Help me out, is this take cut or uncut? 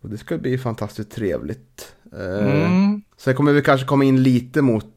cut